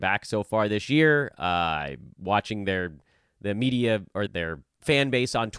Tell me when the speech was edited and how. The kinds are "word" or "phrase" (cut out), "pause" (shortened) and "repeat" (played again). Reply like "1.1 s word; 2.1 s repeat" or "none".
4.3 s word